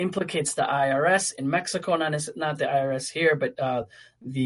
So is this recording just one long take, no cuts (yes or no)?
yes